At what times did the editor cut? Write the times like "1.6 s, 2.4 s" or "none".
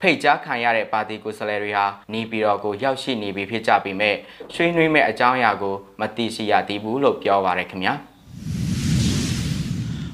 2.0 s